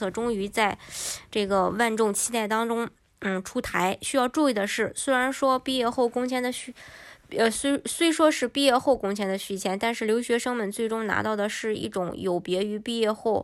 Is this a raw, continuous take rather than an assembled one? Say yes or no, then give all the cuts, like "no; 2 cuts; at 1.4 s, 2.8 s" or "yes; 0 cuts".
yes; 0 cuts